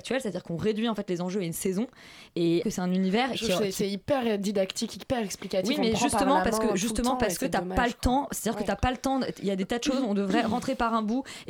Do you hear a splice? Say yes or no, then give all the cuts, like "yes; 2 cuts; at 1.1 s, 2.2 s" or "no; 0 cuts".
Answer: yes; 1 cut; at 2.6 s